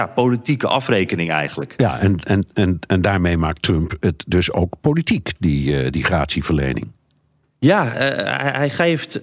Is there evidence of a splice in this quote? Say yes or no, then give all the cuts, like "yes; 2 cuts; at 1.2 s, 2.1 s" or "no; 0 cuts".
no; 0 cuts